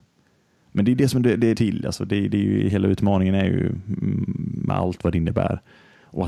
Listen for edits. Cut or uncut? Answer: cut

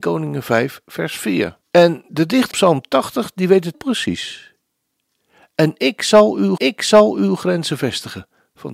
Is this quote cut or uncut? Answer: cut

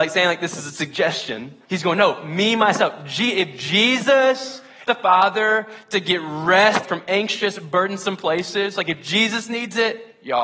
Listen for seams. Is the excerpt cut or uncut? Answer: cut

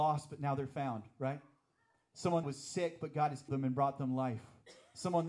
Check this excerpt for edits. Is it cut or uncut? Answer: cut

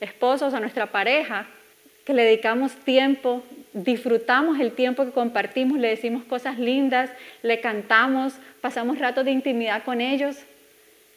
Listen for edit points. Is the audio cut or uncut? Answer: cut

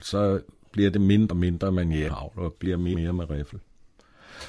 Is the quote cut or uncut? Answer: cut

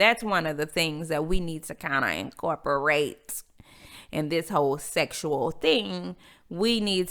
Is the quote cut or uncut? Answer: uncut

